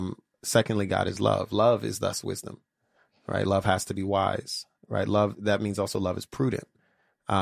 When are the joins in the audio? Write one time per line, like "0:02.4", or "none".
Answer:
none